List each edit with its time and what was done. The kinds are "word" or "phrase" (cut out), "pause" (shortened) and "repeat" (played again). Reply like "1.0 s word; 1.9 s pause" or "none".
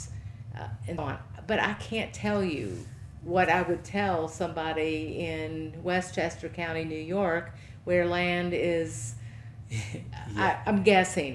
1.0 s word